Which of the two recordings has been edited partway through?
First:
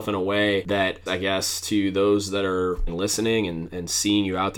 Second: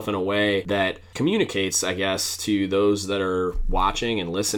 first; 2 cuts; at 1.1 s, 2.9 s

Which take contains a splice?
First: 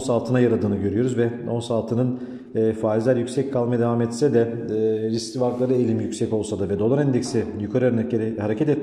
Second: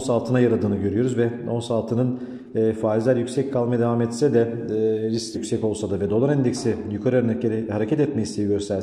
second; 1 cut; at 5.3 s

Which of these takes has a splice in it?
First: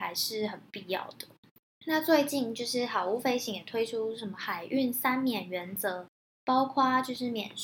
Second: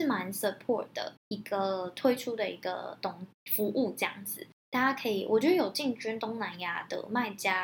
second; 1 cut; at 1.2 s

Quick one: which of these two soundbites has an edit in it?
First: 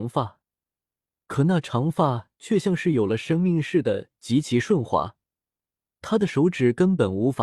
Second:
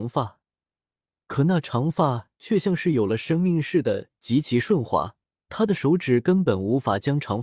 second; 1 cut; at 5.4 s

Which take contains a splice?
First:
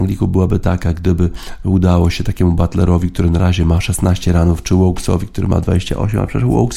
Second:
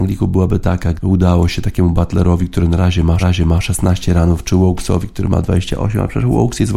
second; 2 cuts; at 1.0 s, 3.2 s

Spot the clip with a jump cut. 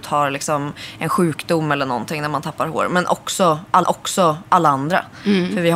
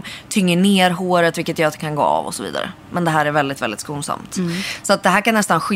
first; 1 cut; at 3.8 s

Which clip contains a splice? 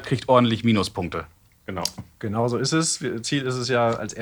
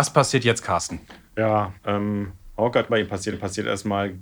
second; 3 cuts; at 1.8 s, 2.9 s, 3.3 s

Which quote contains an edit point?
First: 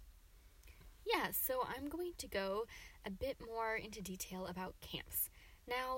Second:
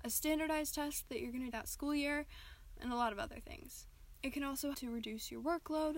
second; 3 cuts; at 1.5 s, 2.8 s, 4.7 s

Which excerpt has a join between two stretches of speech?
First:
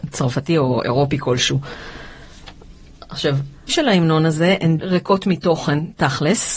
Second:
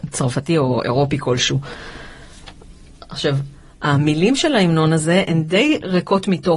first; 2 cuts; at 3.7 s, 4.8 s

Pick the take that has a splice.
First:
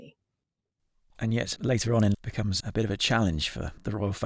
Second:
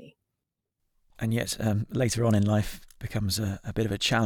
first; 3 cuts; at 1.6 s, 2.1 s, 2.6 s

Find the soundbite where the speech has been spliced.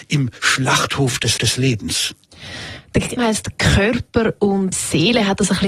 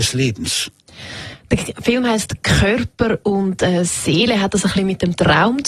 first; 3 cuts; at 1.4 s, 3.2 s, 4.7 s

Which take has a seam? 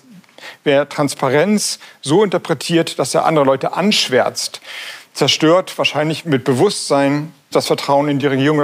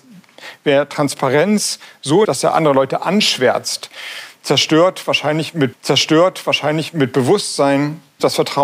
second; 2 cuts; at 2.2 s, 5.7 s

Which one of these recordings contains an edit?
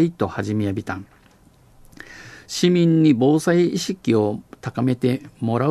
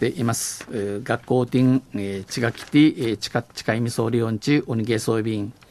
second; 1 cut; at 3.5 s

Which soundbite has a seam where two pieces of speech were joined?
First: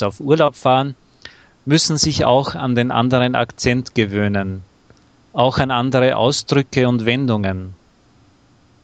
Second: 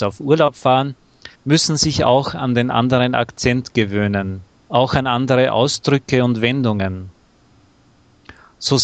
second; 2 cuts; at 1.3 s, 4.5 s

